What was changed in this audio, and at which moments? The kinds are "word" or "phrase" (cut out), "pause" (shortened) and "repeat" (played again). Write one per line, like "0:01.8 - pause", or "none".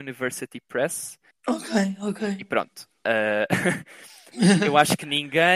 0:01.3 - pause